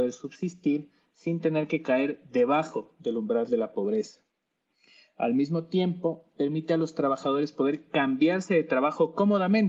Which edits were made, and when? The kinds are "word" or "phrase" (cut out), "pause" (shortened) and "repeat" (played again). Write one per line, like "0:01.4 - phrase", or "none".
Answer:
none

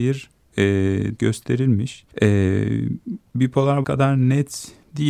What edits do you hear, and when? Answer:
0:01.2 - word
0:02.1 - pause
0:03.8 - phrase

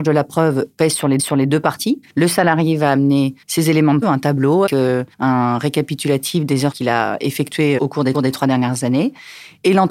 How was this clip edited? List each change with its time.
0:01.2 - repeat
0:02.1 - pause
0:03.4 - pause
0:04.0 - word
0:04.7 - word
0:05.1 - pause
0:06.7 - word
0:07.8 - word
0:08.1 - repeat

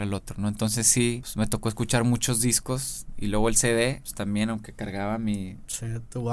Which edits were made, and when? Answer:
none

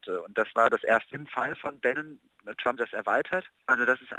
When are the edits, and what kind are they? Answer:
0:01.1 - word
0:02.8 - word

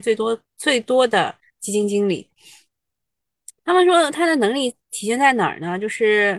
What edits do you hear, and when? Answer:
0:03.6 - pause

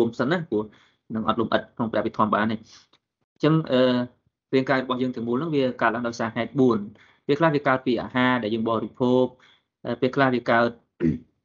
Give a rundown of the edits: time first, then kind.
none

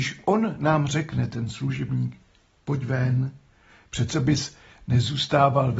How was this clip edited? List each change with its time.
none

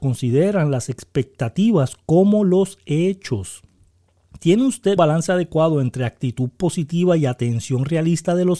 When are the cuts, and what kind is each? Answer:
0:05.0 - word

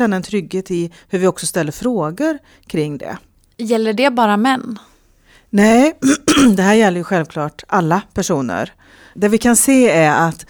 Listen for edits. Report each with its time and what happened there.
none

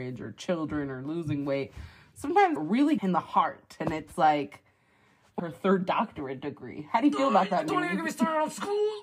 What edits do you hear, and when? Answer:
0:02.6 - phrase
0:03.0 - phrase
0:05.4 - phrase

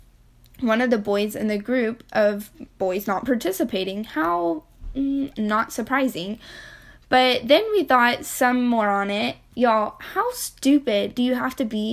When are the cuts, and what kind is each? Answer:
none

